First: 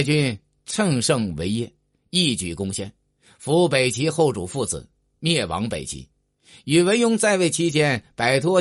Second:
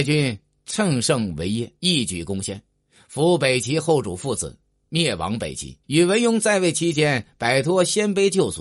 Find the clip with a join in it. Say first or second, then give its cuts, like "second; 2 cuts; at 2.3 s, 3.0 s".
second; 2 cuts; at 1.8 s, 5.8 s